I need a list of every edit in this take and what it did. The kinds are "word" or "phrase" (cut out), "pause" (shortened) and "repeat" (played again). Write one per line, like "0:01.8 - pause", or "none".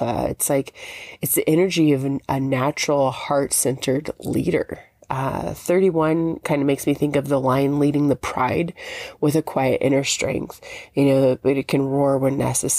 none